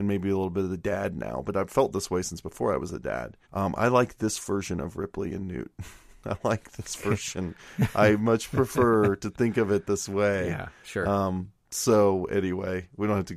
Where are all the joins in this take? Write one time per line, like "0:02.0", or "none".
0:03.4
0:07.6